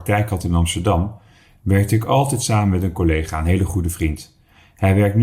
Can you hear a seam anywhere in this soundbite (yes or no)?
no